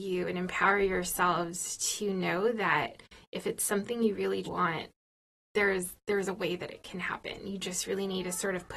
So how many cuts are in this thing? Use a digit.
1